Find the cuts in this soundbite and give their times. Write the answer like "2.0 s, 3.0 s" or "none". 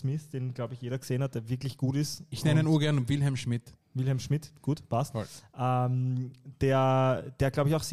3.8 s